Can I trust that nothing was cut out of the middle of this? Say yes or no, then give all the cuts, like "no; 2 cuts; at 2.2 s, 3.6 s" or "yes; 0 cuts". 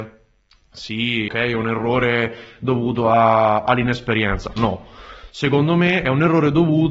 no; 1 cut; at 1.3 s